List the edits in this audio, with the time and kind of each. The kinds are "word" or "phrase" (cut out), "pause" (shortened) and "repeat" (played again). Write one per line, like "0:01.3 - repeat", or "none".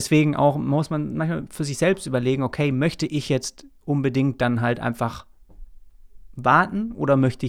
none